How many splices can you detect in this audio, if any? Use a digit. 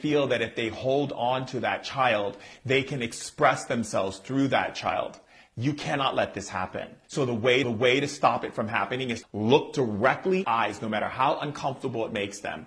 4